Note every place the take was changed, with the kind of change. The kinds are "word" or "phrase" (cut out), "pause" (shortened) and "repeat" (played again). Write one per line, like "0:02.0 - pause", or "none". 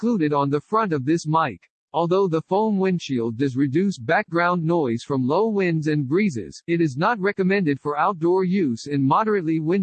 none